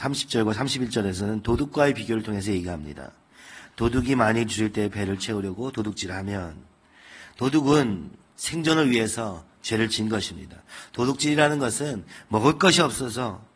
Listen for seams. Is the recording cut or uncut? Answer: uncut